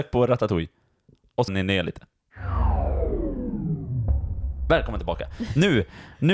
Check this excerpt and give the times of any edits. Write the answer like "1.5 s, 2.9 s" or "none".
1.5 s